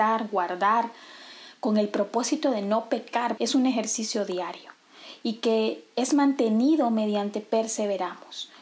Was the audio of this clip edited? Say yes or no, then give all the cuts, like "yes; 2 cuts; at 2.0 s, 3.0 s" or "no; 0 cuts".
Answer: yes; 1 cut; at 3.4 s